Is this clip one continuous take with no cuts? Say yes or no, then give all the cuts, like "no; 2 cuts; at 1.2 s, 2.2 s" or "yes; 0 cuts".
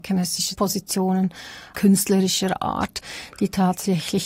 no; 1 cut; at 1.7 s